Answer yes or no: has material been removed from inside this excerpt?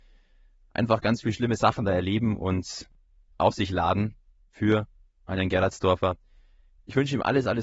no